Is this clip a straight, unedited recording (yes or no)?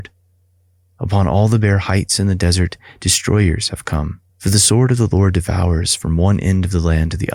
no